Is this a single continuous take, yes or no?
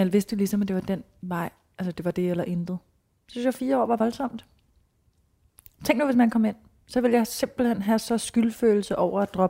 yes